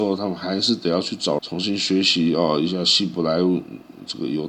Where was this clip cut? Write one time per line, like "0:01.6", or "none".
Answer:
0:01.4